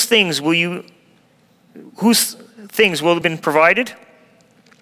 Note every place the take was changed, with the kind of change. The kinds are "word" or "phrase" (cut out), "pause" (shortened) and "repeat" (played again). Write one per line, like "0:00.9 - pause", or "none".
0:03.2 - phrase

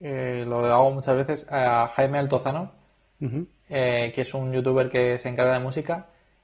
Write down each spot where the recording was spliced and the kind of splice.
none

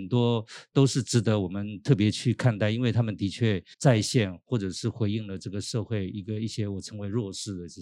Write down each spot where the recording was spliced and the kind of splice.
0:03.7 - pause

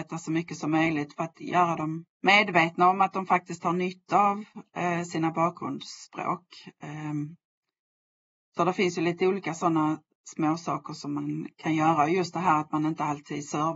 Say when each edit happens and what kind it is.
0:02.1 - pause

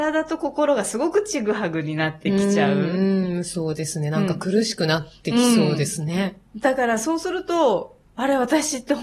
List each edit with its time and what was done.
0:06.5 - pause

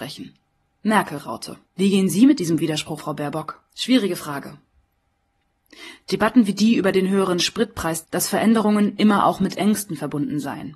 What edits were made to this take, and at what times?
0:01.7 - pause
0:03.0 - word
0:03.7 - pause
0:08.0 - word

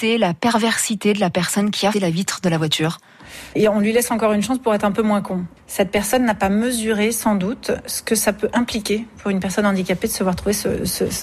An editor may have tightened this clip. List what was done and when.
0:01.9 - word

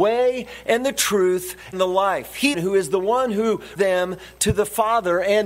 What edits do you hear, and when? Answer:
0:01.7 - word
0:02.5 - word
0:03.8 - word

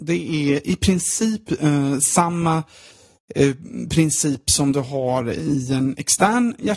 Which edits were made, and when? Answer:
none

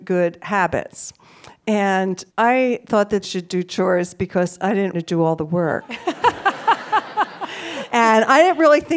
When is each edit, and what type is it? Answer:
0:02.3 - word
0:03.2 - word
0:04.9 - word

